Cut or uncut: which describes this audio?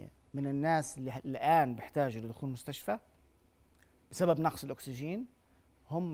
uncut